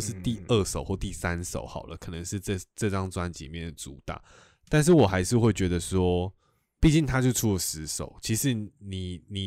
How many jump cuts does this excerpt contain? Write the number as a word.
one